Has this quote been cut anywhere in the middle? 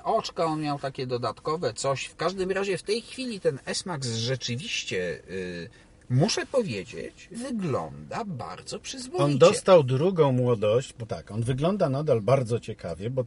yes; 3 cuts; at 5.8 s, 7.3 s, 11.1 s

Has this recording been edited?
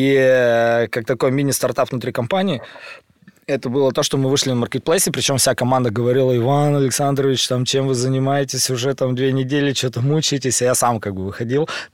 no; 0 cuts

